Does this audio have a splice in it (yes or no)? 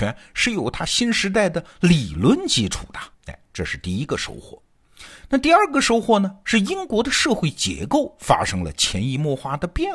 yes